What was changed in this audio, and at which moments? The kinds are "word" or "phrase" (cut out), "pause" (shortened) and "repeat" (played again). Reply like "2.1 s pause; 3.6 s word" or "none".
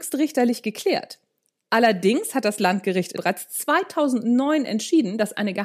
3.2 s word